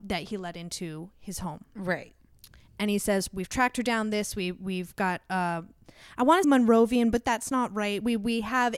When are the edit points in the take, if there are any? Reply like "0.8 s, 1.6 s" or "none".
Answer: 6.4 s

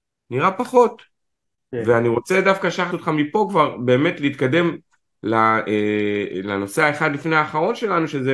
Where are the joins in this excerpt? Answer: 2.9 s

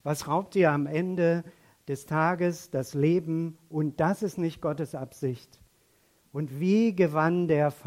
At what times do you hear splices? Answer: none

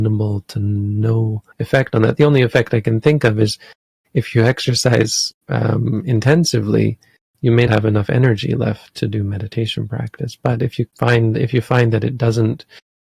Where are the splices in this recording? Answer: 1.5 s, 5.4 s, 7.7 s, 10.9 s

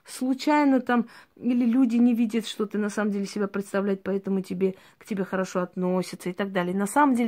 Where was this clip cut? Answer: none

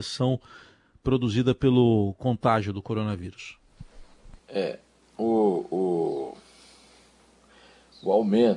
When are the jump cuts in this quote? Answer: 4.4 s

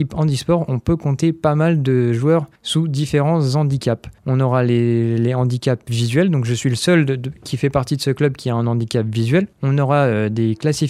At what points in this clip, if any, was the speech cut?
2.6 s, 4.2 s, 9.5 s

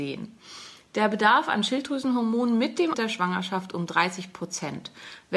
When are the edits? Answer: 2.9 s

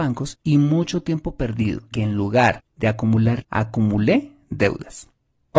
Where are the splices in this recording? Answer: 1.9 s, 3.4 s

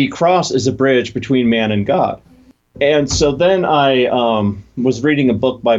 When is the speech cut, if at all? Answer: none

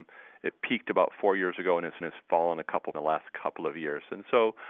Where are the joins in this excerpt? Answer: 2.0 s, 2.9 s

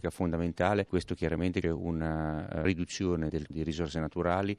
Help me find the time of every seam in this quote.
1.6 s, 3.5 s

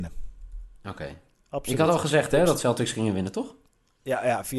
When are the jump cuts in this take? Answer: none

